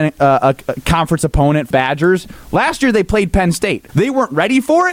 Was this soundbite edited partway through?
yes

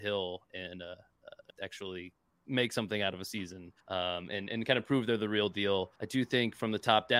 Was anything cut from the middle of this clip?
yes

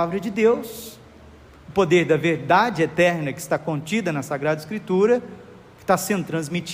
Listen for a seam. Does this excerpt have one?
no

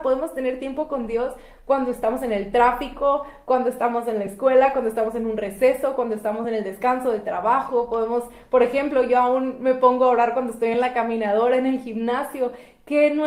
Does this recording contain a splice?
no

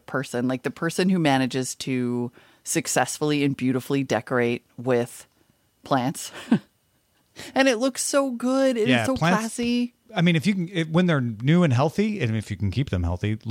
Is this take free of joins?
yes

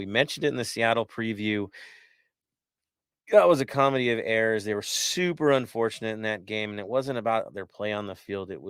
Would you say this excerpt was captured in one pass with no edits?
yes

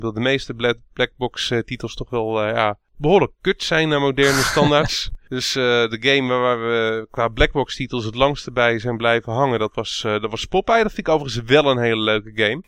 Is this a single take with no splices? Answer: yes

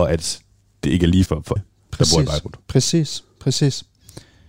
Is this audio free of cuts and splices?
no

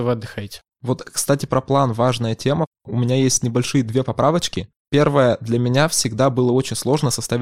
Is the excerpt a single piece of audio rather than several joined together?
yes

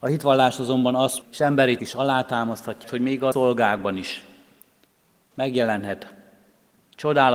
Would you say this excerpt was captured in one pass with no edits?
no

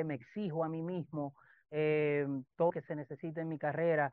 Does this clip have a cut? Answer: yes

